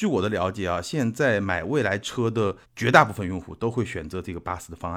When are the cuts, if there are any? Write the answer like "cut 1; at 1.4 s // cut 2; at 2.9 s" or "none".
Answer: cut 1; at 2.6 s